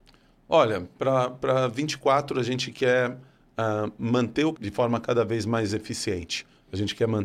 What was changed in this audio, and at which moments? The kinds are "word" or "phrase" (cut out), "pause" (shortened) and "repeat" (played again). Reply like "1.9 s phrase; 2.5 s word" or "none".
4.5 s word